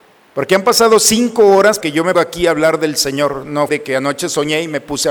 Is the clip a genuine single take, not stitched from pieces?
no; 3 cuts; at 1.8 s, 2.1 s, 3.7 s

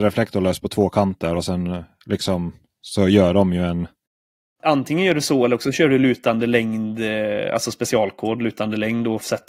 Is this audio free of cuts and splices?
yes; 0 cuts

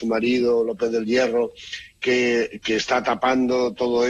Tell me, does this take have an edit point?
no; 0 cuts

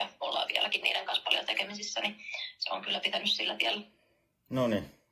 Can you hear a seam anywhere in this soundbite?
no; 0 cuts

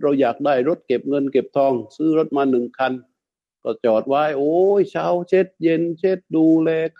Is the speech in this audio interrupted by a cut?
no; 0 cuts

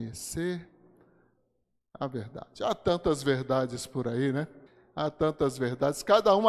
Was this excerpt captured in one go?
no; 1 cut; at 4.7 s

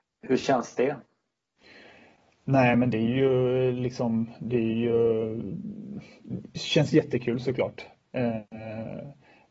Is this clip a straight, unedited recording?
yes; 0 cuts

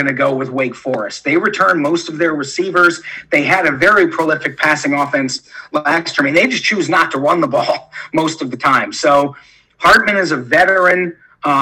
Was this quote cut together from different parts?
no; 0 cuts

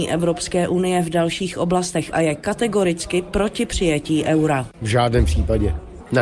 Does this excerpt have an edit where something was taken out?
no; 0 cuts

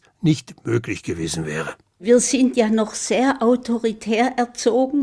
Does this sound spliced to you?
no; 0 cuts

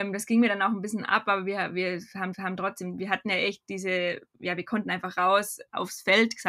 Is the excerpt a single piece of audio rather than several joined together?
no; 1 cut; at 2.3 s

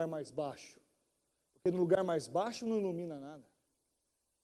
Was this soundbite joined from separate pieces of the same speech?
no; 0 cuts

